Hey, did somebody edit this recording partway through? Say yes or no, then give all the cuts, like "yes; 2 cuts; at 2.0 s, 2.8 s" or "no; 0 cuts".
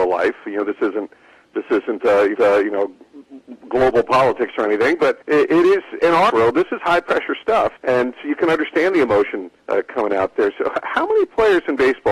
yes; 6 cuts; at 2.3 s, 5.2 s, 6.0 s, 6.3 s, 7.8 s, 9.6 s